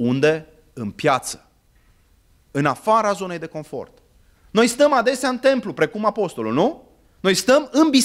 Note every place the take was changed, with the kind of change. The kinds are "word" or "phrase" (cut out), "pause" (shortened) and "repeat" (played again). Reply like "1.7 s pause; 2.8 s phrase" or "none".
none